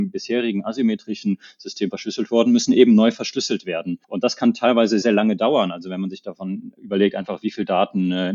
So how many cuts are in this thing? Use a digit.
2